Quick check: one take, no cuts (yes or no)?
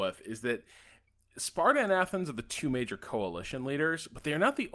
yes